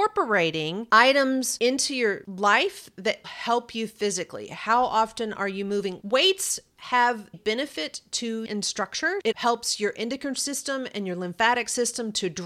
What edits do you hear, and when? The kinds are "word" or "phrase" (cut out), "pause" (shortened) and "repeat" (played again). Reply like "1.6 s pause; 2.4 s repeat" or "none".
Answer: 3.2 s word; 7.3 s word; 8.5 s phrase; 9.3 s word